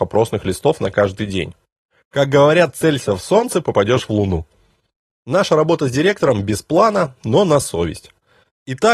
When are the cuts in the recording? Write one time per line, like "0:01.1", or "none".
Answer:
none

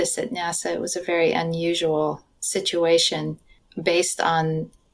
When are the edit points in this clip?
none

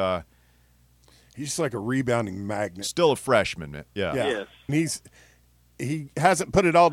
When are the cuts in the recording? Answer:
0:04.7

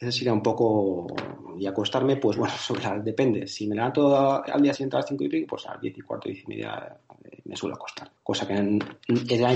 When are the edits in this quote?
0:04.5
0:08.2

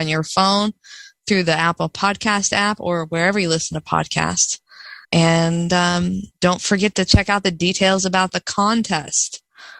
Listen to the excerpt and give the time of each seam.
0:05.0
0:06.3

